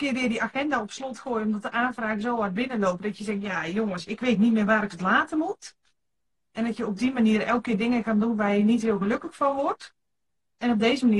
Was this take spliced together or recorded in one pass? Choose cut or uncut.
uncut